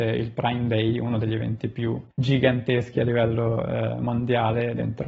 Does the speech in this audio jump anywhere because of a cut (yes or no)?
yes